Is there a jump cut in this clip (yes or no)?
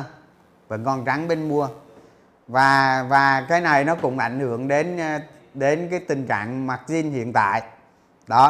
no